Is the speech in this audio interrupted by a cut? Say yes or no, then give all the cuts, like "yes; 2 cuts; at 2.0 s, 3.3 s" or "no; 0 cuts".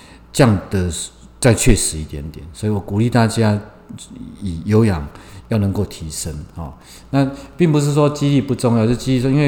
no; 0 cuts